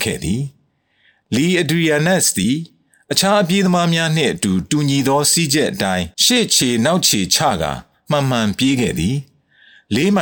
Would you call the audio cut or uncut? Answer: cut